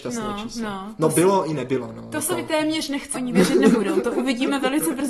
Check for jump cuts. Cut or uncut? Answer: cut